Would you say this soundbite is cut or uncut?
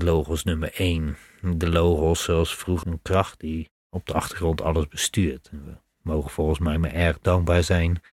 cut